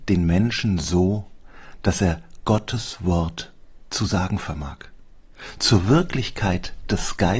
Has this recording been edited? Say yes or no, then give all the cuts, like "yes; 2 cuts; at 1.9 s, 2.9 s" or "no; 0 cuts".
no; 0 cuts